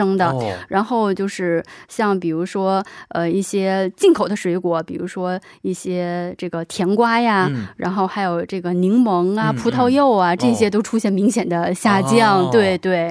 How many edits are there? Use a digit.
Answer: 0